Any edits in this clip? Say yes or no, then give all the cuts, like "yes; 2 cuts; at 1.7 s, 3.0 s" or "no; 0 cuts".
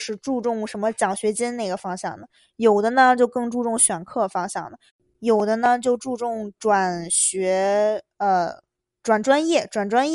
no; 0 cuts